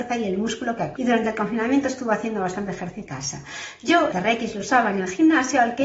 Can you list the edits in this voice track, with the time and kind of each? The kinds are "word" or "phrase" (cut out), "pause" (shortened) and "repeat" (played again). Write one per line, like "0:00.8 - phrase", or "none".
0:01.0 - word
0:03.1 - word
0:04.1 - word